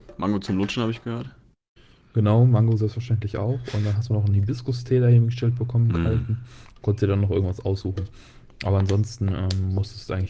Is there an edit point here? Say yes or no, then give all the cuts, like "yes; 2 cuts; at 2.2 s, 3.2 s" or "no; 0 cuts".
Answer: no; 0 cuts